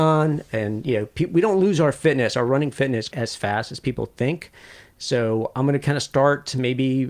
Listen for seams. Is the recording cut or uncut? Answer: cut